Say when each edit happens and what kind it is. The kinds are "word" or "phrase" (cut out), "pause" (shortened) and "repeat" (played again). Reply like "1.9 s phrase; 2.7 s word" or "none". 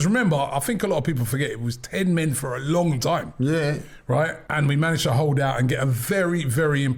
4.5 s pause

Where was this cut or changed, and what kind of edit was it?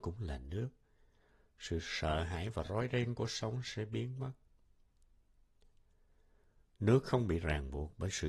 none

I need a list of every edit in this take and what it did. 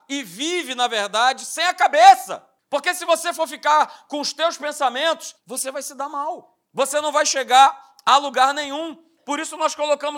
2.6 s pause; 5.4 s pause; 6.6 s pause

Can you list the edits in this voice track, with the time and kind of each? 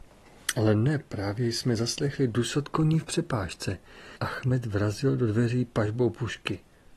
4.2 s pause

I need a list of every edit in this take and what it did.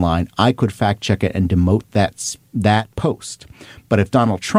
2.9 s pause

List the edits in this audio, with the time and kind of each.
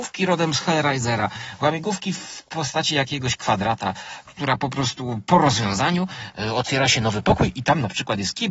none

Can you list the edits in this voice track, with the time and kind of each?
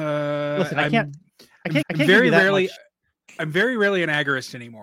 1.3 s pause; 1.8 s repeat

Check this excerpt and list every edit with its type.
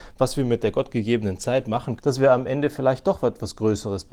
2.0 s word

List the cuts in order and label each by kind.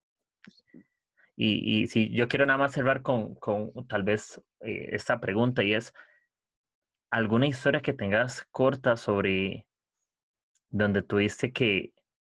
none

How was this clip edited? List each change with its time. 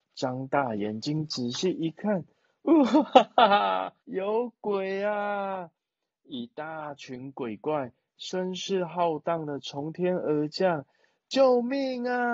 4.0 s pause

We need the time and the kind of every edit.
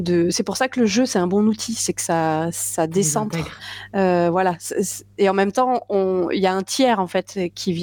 none

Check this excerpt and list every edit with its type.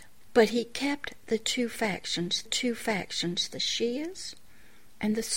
2.5 s repeat

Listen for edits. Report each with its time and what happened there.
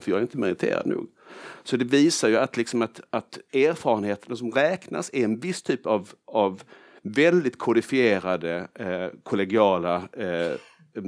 none

